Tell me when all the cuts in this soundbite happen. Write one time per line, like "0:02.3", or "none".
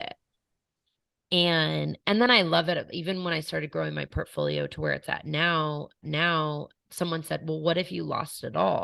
0:06.0